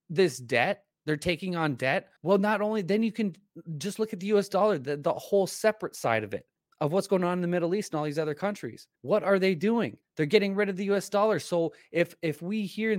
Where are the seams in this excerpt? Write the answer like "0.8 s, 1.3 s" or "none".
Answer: 0.9 s, 2.2 s, 6.6 s, 9.0 s, 10.0 s